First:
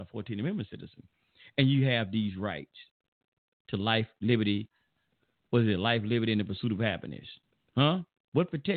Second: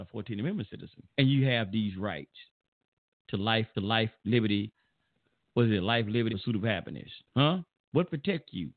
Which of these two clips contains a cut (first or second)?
second